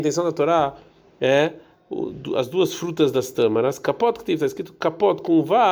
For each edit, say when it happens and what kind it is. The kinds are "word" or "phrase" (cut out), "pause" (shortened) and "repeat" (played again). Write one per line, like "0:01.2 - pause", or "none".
none